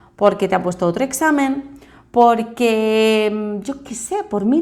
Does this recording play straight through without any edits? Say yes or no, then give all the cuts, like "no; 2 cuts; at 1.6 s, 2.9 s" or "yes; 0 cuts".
yes; 0 cuts